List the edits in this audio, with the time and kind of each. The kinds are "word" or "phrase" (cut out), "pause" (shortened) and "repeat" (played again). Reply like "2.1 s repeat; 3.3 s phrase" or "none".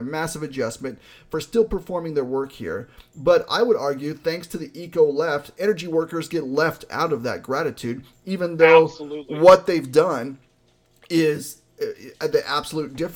none